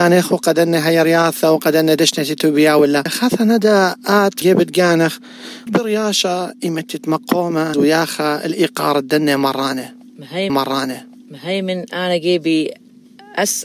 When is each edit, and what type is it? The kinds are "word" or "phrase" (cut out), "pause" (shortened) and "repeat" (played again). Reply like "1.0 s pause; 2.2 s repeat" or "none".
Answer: 4.4 s word; 5.7 s word; 7.7 s word; 10.5 s repeat